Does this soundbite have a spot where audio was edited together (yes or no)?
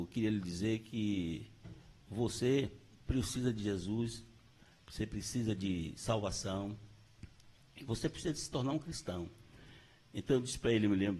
no